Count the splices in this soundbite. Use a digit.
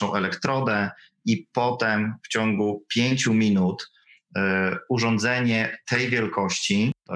0